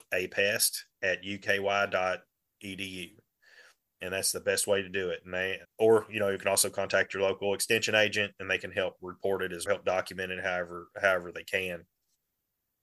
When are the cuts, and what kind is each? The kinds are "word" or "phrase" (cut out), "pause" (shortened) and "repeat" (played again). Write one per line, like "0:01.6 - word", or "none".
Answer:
0:05.6 - word
0:09.7 - phrase